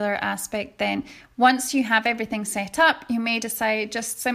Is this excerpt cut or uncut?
uncut